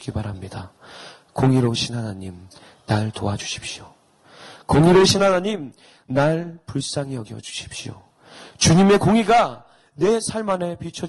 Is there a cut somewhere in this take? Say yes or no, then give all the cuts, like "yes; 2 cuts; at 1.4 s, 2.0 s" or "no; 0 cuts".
no; 0 cuts